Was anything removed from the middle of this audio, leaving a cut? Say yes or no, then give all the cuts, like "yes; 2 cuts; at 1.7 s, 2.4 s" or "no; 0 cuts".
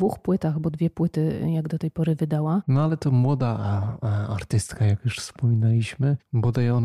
no; 0 cuts